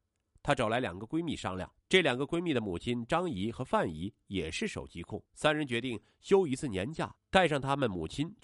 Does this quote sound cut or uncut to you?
cut